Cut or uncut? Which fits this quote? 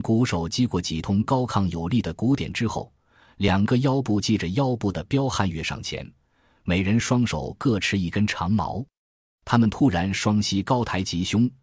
uncut